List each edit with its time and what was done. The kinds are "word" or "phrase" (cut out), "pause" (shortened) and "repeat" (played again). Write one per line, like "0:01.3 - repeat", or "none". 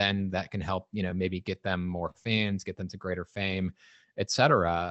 none